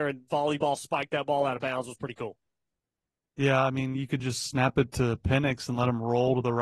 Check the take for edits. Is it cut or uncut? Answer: uncut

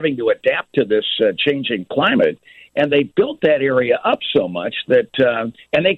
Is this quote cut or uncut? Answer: uncut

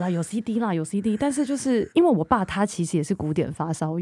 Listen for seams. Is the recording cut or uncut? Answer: cut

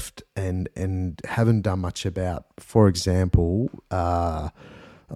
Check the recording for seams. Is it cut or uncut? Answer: uncut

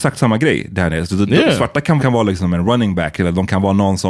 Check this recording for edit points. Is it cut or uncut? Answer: cut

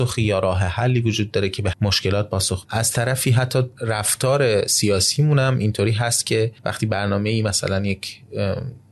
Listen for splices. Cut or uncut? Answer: cut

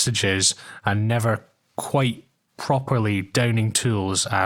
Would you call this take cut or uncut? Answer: uncut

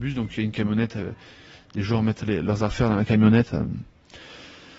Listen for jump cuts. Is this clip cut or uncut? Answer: uncut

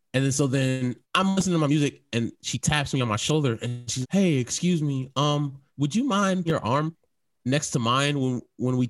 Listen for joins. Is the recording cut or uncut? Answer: cut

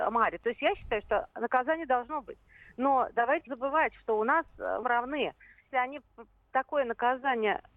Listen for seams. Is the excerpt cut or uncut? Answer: cut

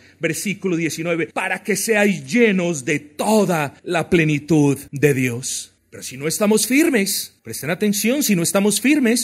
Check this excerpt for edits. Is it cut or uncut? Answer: cut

